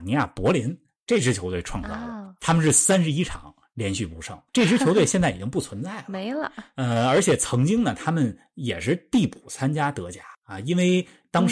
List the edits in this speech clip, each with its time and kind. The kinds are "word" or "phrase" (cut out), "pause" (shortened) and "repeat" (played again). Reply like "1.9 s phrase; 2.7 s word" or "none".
4.5 s pause; 10.3 s pause